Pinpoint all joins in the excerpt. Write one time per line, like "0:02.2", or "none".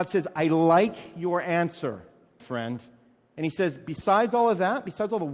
0:02.4